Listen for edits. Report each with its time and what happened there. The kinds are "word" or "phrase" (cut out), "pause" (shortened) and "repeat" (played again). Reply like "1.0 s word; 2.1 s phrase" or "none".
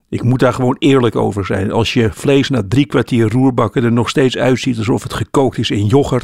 none